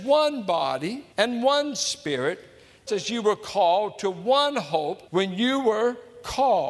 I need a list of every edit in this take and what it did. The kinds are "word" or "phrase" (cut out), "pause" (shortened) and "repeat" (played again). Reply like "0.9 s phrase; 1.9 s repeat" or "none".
1.1 s pause; 2.9 s word; 5.1 s pause